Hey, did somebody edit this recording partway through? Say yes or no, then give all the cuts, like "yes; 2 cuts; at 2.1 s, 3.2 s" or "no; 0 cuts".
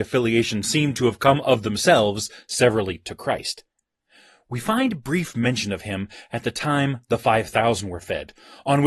no; 0 cuts